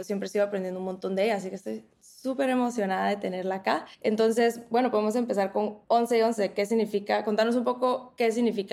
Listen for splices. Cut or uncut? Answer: cut